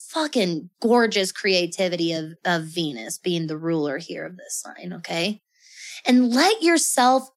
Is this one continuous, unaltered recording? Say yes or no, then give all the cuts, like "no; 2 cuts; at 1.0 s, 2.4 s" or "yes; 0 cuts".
yes; 0 cuts